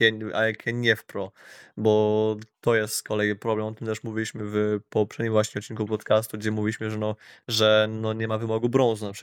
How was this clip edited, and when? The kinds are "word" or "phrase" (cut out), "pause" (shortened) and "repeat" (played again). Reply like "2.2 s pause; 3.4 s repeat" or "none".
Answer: none